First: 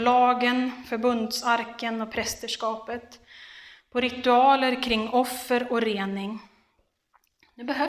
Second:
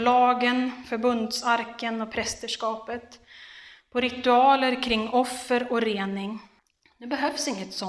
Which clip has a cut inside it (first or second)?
second